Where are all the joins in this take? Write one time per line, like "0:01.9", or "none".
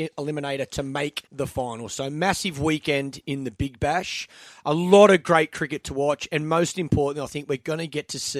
0:01.3